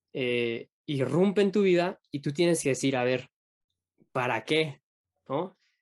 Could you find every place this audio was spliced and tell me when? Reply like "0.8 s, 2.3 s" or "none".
none